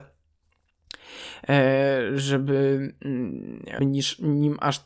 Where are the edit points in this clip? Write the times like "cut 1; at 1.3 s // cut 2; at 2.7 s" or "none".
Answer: cut 1; at 3.8 s